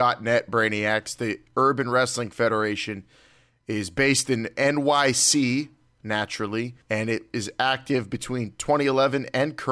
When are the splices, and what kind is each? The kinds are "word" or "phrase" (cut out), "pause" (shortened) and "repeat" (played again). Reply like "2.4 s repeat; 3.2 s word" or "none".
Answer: 6.8 s pause